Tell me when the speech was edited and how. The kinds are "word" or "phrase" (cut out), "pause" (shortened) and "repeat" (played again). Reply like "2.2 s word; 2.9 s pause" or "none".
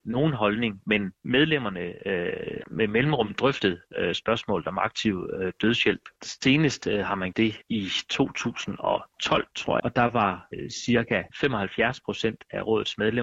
2.6 s word; 7.3 s word; 9.8 s word